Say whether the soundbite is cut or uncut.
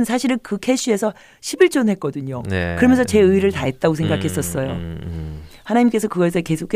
uncut